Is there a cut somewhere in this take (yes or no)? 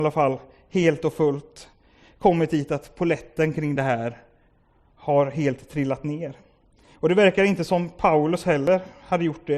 no